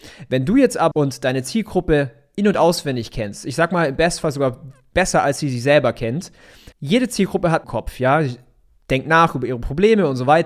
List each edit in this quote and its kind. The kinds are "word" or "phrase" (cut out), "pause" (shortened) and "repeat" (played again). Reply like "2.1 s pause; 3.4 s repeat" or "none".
0.9 s word; 6.7 s pause; 7.6 s phrase